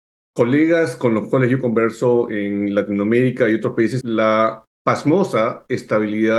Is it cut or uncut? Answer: cut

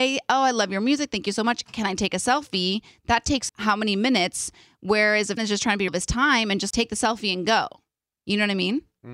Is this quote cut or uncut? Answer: cut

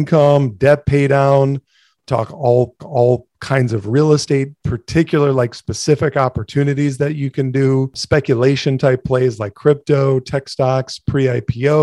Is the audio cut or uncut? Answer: cut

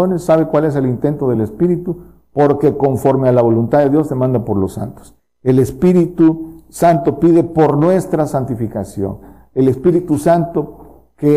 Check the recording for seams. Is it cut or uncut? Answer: uncut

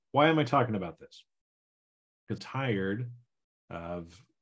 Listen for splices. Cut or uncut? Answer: cut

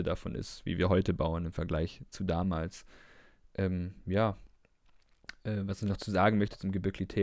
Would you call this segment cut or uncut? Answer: uncut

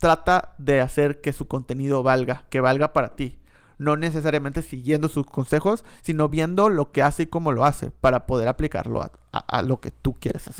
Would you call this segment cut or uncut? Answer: uncut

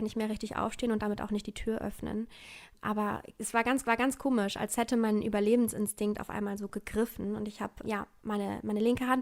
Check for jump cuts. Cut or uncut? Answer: cut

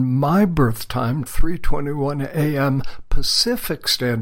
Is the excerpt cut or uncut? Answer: cut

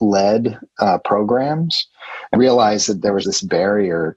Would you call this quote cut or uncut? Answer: cut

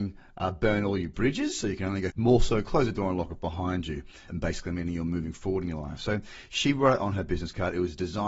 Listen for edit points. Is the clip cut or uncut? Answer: cut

